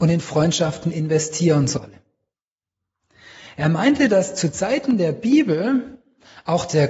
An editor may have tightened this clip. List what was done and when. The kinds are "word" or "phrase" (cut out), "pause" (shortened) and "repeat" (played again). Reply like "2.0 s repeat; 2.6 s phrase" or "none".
none

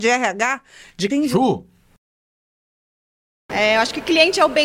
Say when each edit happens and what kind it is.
1.1 s phrase

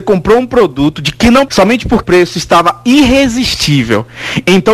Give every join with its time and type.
1.5 s word; 2.0 s word

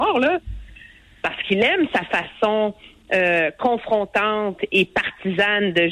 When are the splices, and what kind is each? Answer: none

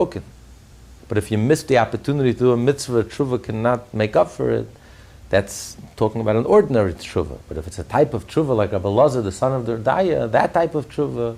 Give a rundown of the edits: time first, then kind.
none

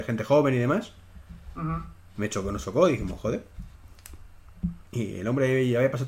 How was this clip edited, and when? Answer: 4.9 s pause

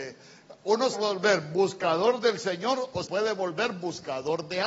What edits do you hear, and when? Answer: 0.9 s phrase; 3.0 s word

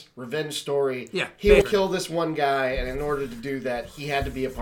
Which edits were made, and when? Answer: 1.6 s word

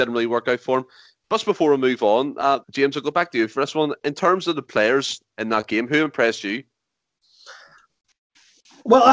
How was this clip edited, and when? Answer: 2.6 s pause

